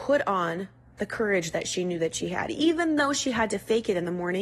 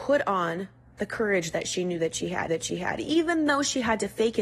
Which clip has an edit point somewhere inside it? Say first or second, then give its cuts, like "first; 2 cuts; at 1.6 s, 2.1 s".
second; 1 cut; at 2.5 s